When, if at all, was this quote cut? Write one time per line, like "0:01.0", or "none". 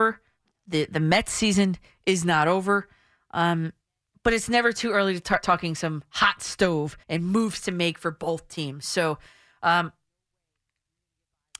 0:05.4
0:07.0